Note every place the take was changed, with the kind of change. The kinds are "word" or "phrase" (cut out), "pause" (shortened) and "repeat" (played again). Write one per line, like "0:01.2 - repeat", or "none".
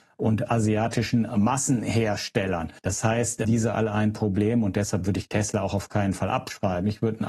0:02.8 - pause
0:03.4 - phrase